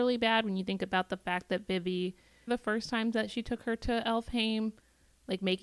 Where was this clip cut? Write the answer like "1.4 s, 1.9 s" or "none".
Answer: 2.5 s